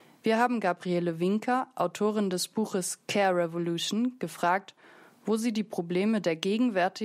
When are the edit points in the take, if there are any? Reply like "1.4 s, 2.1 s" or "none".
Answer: none